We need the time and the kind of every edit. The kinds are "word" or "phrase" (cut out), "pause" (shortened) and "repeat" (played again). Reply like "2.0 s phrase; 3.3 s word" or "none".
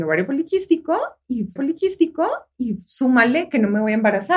1.6 s repeat